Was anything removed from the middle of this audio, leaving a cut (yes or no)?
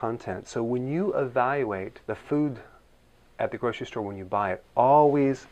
yes